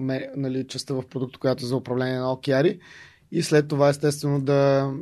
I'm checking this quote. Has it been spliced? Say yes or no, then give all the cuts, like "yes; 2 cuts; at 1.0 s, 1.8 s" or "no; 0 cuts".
no; 0 cuts